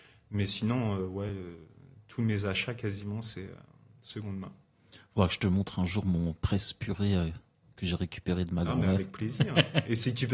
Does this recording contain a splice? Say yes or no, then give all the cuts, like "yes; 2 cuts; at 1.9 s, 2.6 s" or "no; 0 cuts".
no; 0 cuts